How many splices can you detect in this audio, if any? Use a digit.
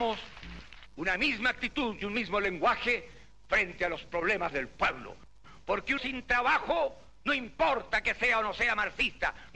2